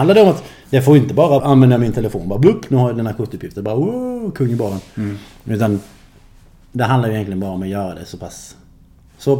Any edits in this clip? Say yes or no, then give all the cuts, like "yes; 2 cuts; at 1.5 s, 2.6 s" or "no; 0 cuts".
yes; 1 cut; at 1.4 s